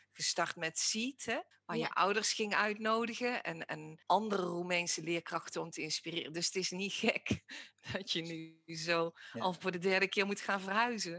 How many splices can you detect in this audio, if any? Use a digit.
2